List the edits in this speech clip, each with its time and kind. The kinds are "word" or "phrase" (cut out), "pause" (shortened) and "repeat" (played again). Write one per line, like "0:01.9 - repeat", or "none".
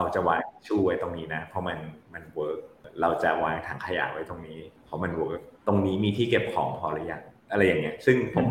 0:02.0 - pause
0:05.6 - pause